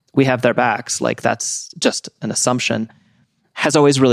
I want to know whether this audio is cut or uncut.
uncut